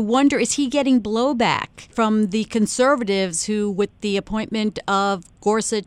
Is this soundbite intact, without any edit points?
yes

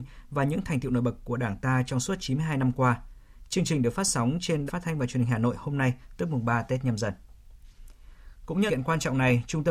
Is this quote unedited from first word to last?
no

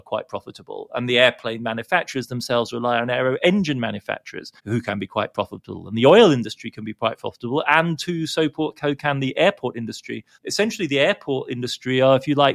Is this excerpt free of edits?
no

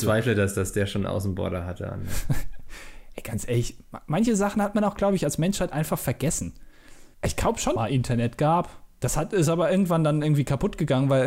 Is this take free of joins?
no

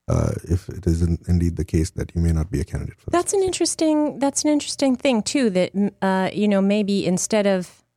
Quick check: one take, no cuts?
yes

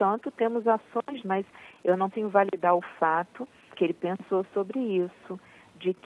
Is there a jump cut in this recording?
yes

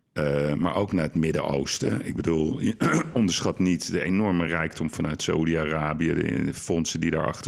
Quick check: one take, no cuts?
yes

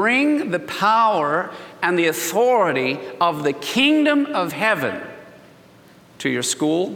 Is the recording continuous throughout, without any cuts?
yes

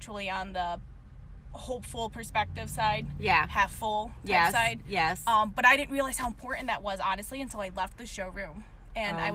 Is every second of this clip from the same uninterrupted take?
yes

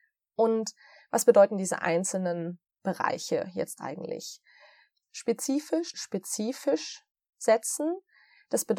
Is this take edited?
yes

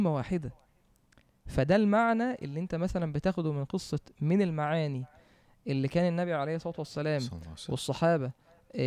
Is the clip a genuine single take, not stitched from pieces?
yes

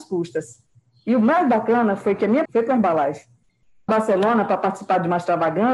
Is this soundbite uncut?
no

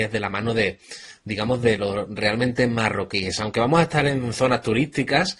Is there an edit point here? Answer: no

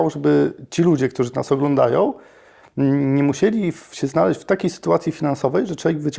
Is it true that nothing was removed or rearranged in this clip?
yes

